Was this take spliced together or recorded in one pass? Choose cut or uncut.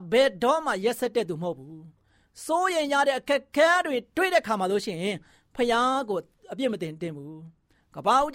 uncut